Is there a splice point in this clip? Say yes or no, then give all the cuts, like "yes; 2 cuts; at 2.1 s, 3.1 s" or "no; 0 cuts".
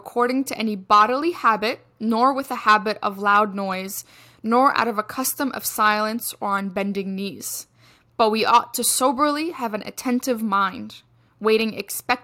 no; 0 cuts